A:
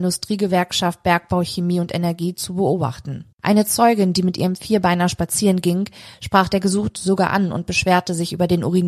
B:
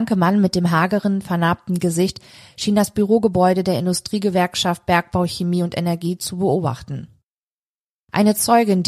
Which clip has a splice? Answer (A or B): A